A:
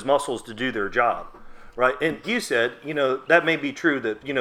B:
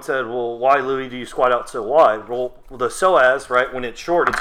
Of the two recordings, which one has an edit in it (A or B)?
A